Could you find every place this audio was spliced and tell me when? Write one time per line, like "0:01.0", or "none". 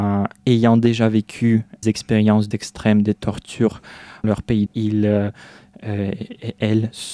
0:01.8
0:02.5
0:04.2
0:04.7